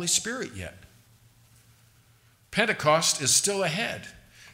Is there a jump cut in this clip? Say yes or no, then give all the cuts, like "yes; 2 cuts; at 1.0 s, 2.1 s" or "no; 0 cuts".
no; 0 cuts